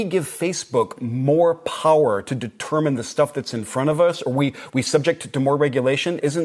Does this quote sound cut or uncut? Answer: uncut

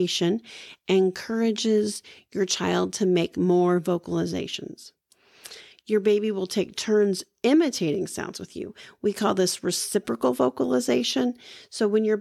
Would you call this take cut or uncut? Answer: uncut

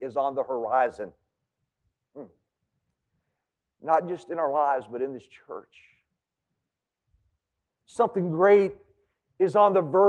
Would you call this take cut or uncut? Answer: uncut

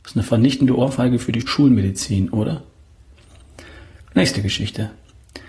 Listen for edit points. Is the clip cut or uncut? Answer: cut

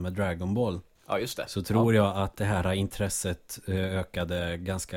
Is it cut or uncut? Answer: cut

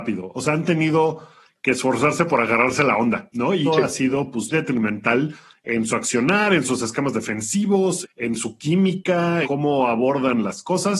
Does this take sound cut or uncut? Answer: cut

